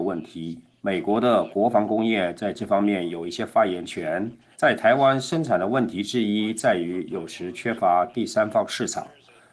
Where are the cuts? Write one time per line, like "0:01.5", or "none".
0:04.5